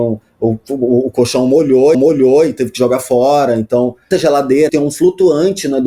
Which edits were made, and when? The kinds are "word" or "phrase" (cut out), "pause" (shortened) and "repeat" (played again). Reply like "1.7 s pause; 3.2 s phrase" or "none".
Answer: 1.9 s repeat; 4.1 s word; 4.7 s word